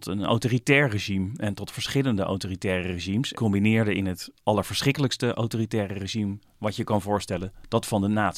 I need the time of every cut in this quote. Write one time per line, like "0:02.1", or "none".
0:03.3